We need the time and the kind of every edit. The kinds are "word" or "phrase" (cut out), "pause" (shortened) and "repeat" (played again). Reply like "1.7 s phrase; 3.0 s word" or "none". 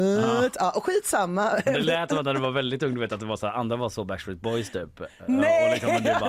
none